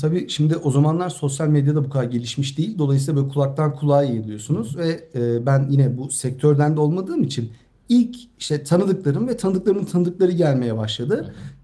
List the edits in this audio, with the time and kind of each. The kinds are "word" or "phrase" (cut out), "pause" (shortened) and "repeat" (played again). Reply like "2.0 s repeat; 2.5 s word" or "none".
none